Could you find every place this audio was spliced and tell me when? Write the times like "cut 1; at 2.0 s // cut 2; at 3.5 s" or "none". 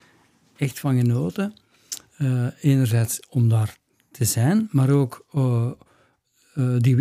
none